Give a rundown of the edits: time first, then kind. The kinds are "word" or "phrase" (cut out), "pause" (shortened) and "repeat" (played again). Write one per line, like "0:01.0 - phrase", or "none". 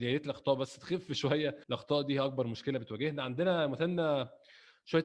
0:01.6 - pause